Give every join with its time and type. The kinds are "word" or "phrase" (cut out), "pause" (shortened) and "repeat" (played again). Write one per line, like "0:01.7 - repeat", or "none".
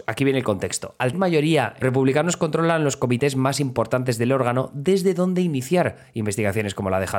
0:01.1 - word
0:01.8 - phrase